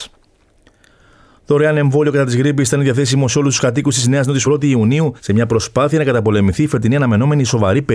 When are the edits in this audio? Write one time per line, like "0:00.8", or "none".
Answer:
0:04.4
0:05.2

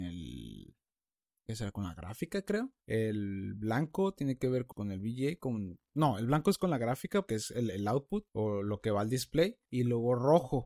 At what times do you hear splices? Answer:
0:02.8
0:04.7
0:07.3
0:08.3
0:09.6

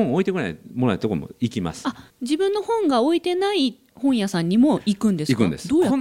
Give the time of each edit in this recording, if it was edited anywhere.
0:02.1

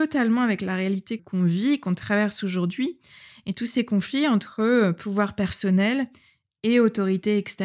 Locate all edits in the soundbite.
0:01.2

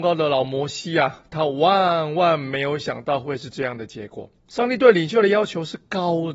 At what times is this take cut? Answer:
0:04.4

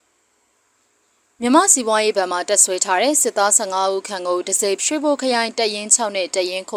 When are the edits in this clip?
0:04.8

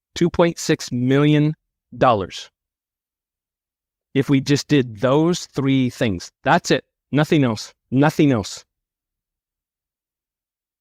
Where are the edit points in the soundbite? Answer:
none

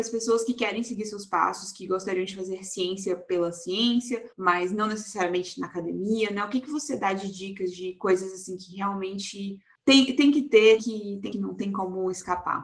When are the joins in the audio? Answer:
0:04.3
0:10.8
0:11.3

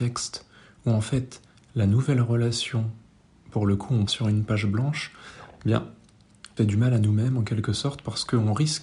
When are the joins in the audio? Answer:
0:04.1
0:06.6

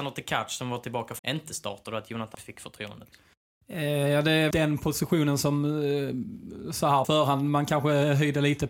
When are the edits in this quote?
0:01.2
0:02.3
0:04.5
0:07.0

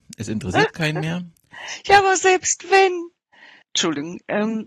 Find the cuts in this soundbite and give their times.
0:03.6

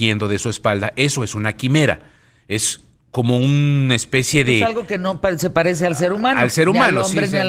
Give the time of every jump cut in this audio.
none

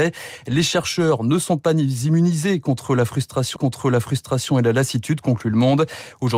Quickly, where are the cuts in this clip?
0:03.6

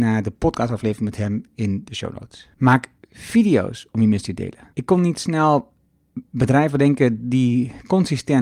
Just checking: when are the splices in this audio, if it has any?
0:02.5
0:04.7

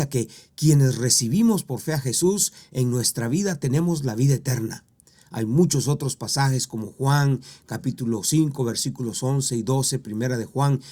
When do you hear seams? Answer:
none

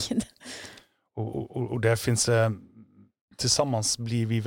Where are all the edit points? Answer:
none

